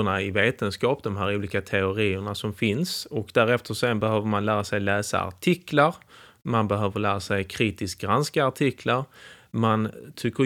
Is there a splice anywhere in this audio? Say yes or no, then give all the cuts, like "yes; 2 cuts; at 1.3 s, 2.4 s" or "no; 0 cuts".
no; 0 cuts